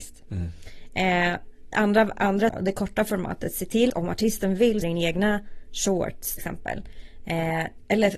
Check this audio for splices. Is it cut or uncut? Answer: cut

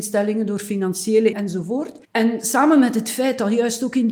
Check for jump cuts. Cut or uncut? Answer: cut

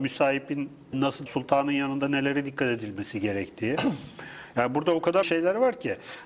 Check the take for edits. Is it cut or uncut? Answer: cut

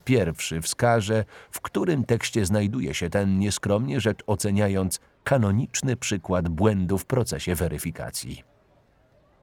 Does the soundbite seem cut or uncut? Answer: uncut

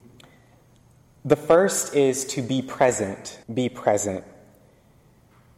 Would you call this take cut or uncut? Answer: cut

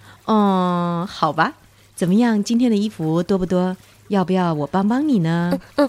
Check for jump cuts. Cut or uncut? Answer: uncut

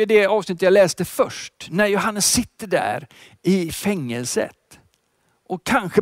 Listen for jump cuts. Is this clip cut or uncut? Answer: uncut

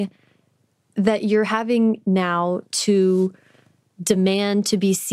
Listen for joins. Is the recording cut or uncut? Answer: uncut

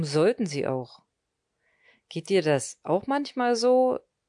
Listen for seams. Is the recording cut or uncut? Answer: uncut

